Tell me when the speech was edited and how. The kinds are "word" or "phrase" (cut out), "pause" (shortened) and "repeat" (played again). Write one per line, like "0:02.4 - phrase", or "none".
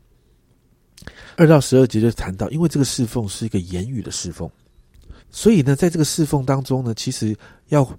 0:01.3 - pause
0:05.2 - pause